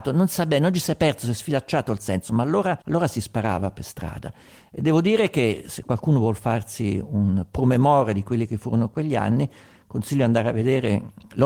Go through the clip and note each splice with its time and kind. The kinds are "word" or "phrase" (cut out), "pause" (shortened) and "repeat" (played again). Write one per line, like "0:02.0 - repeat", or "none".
0:02.8 - pause